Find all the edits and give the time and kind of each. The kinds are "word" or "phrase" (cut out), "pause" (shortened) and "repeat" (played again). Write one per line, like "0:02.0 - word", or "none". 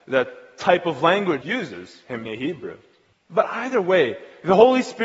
0:01.4 - phrase
0:02.2 - word
0:03.1 - pause